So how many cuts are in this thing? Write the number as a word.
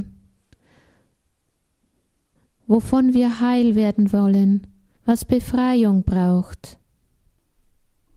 one